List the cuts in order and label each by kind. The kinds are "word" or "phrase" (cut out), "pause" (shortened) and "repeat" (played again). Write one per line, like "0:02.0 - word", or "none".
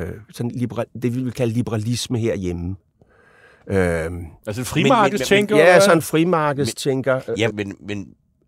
0:07.5 - word